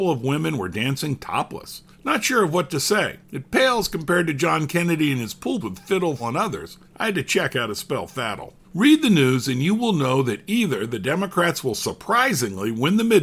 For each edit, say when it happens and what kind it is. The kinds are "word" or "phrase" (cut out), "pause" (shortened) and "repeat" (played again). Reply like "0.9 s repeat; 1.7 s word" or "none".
1.9 s pause; 3.2 s pause; 5.6 s word; 6.2 s word; 6.8 s pause; 8.6 s pause